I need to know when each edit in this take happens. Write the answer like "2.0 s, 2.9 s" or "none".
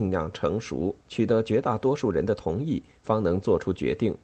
1.0 s

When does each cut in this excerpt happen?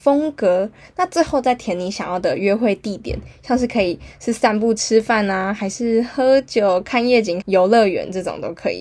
7.4 s

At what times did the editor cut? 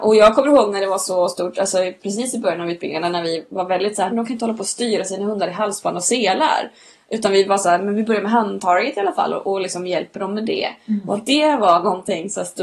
4.1 s

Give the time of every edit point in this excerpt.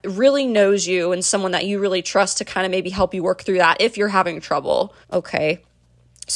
5.0 s

